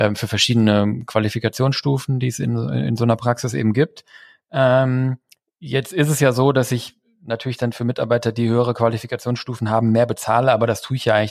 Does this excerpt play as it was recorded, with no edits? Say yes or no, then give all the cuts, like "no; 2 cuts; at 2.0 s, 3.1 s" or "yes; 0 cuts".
yes; 0 cuts